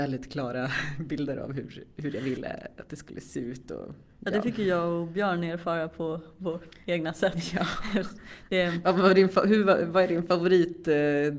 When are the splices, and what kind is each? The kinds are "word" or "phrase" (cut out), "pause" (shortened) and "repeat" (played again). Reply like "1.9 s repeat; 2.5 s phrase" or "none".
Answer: 6.8 s pause